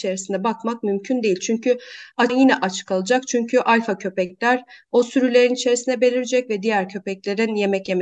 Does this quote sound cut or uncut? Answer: cut